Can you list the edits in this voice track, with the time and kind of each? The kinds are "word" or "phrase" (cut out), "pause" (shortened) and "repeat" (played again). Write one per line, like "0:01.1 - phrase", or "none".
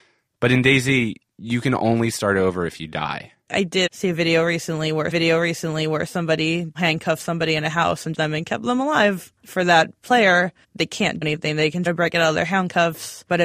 0:03.4 - pause
0:03.9 - word
0:05.1 - repeat
0:08.1 - phrase
0:09.4 - pause
0:10.0 - word
0:10.6 - pause
0:11.2 - word
0:11.9 - word